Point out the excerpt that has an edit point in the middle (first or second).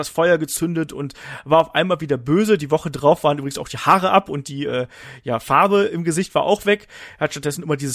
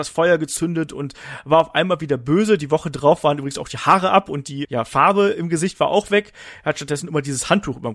second